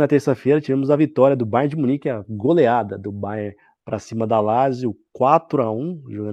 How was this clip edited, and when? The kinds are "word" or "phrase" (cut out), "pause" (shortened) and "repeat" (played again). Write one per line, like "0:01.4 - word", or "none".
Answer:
none